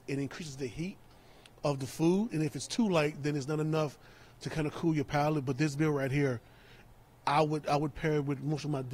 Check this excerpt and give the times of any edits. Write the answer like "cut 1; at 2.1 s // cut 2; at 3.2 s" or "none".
none